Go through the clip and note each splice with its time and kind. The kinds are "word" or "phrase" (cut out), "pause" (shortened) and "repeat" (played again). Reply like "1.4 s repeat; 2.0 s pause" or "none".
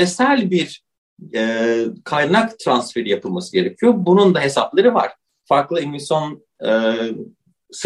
none